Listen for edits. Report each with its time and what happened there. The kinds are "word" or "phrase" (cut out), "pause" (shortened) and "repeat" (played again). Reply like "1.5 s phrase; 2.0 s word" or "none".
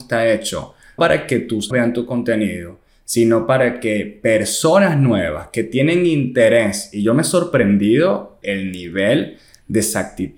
1.0 s word; 1.7 s word; 8.4 s word